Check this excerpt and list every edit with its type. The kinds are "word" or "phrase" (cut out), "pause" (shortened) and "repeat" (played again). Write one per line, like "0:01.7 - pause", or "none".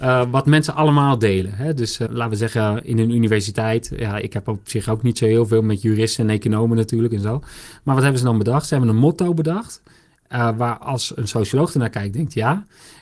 0:02.1 - word